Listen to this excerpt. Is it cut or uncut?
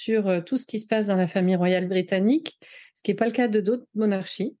uncut